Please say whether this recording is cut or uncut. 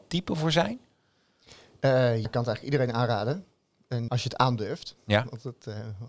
cut